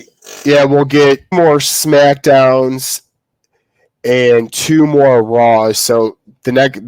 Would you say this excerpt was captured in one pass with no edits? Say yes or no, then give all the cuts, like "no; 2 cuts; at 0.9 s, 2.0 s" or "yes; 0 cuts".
no; 1 cut; at 1.3 s